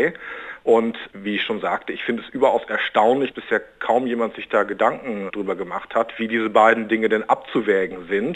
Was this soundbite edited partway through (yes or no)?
yes